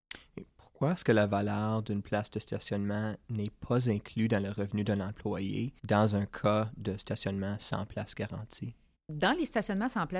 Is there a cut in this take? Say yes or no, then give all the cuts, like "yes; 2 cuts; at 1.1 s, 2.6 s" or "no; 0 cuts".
yes; 2 cuts; at 5.8 s, 9.0 s